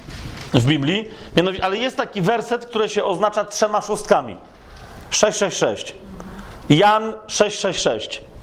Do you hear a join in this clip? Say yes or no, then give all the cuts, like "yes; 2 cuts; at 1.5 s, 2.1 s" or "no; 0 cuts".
no; 0 cuts